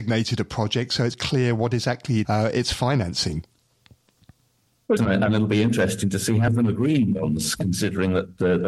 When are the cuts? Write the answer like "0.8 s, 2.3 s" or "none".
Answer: 1.1 s, 2.2 s, 5.0 s, 6.5 s